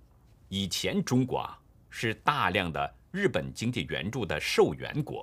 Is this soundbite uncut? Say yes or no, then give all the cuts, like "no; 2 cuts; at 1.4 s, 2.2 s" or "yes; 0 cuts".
yes; 0 cuts